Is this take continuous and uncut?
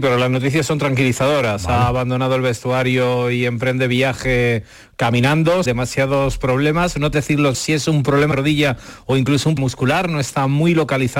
no; 5 cuts; at 5.7 s, 7.1 s, 7.5 s, 8.3 s, 9.6 s

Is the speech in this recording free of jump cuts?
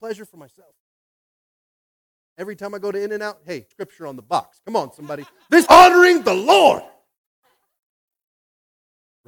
no; 2 cuts; at 3.7 s, 5.7 s

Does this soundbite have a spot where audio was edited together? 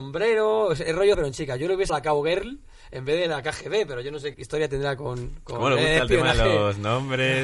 yes; 3 cuts; at 1.1 s, 1.9 s, 4.3 s

